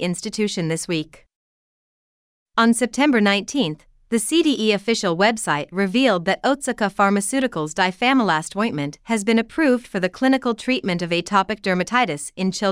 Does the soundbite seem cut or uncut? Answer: uncut